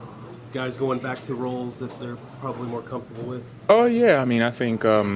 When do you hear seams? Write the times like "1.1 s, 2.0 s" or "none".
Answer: none